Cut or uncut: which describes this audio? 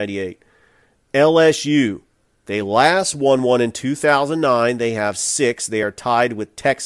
uncut